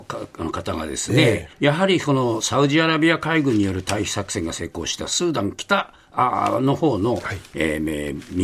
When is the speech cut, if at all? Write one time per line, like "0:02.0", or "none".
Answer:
0:01.5